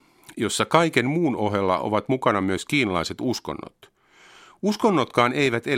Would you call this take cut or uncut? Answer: uncut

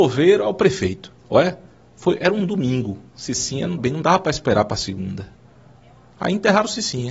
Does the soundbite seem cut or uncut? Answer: cut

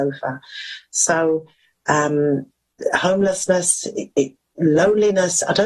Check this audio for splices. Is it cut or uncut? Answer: uncut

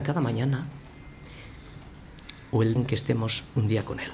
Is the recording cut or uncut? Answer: cut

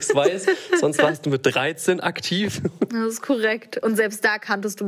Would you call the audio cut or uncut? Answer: uncut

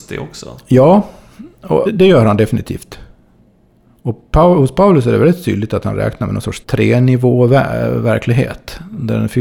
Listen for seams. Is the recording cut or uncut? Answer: cut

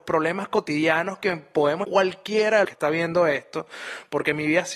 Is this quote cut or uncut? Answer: cut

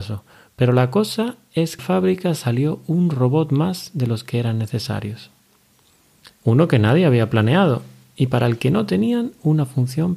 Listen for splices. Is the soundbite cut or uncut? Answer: cut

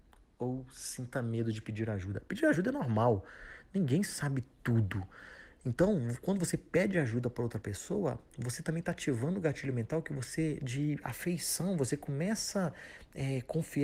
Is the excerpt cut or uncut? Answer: uncut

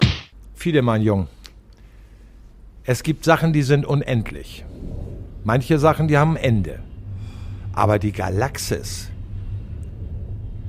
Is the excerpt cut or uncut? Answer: uncut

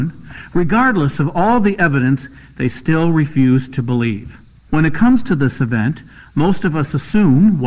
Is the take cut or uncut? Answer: uncut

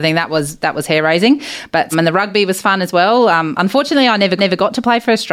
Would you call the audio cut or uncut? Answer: cut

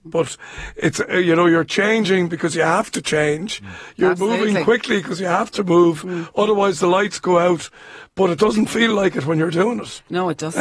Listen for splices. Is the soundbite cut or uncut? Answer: uncut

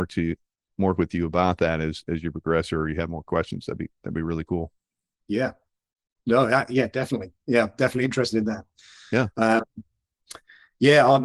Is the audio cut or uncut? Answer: uncut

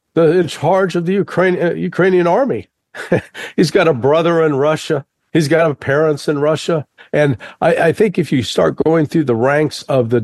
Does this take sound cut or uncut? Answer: uncut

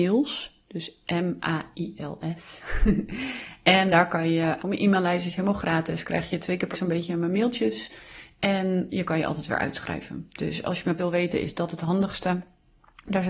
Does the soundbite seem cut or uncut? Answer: cut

